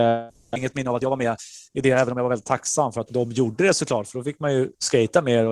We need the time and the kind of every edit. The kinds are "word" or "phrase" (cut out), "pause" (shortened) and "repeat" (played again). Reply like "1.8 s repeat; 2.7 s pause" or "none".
3.1 s word

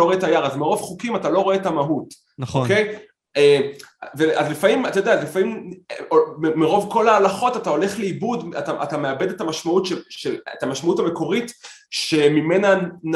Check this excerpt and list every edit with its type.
none

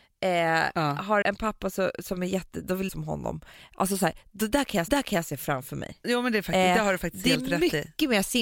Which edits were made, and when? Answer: 1.2 s word; 2.9 s phrase; 4.9 s repeat; 6.0 s word

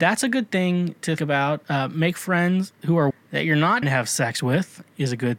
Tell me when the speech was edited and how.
1.2 s word; 3.1 s word; 3.8 s word

